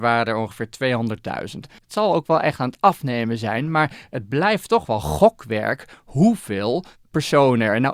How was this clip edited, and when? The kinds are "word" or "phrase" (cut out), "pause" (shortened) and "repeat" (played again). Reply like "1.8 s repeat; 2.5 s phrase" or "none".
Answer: 1.8 s pause